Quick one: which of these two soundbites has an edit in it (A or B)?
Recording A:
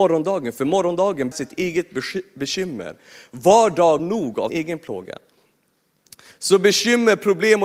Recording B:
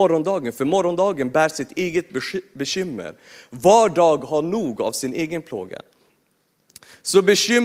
A